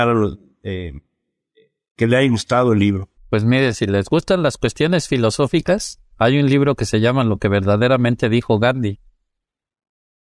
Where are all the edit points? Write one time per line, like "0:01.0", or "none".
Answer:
0:03.2
0:06.1